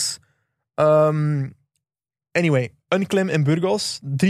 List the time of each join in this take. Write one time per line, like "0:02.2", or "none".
none